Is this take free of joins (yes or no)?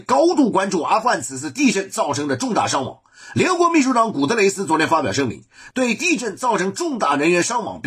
yes